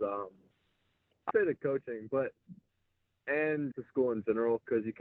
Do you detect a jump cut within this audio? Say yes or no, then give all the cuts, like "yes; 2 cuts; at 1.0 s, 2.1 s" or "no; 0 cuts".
yes; 2 cuts; at 1.3 s, 3.7 s